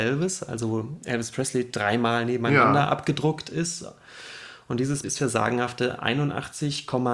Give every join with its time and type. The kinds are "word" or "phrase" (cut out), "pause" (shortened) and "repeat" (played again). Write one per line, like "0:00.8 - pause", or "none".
0:05.0 - word